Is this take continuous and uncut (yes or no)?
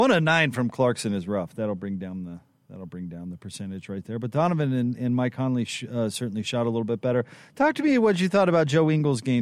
yes